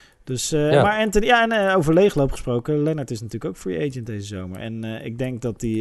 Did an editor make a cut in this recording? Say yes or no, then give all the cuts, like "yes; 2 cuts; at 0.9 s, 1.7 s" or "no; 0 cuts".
no; 0 cuts